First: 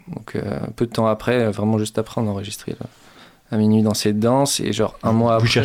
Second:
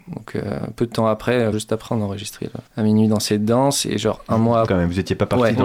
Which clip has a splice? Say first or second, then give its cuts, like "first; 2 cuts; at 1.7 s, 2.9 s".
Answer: second; 3 cuts; at 1.5 s, 2.7 s, 4.7 s